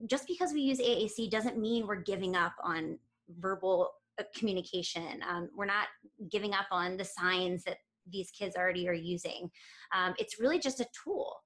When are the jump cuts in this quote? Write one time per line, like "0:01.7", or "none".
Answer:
none